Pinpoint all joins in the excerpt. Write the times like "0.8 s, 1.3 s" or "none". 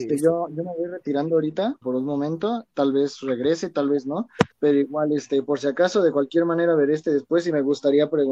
1.8 s, 4.5 s